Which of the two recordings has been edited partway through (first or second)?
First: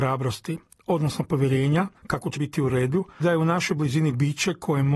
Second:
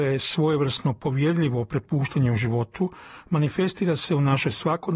first